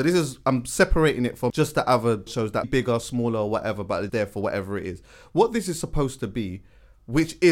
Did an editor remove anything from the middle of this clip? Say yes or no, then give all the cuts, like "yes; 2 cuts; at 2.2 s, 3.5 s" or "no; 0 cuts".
yes; 4 cuts; at 1.5 s, 2.3 s, 2.6 s, 4.1 s